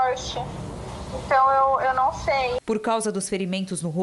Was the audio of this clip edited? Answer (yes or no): yes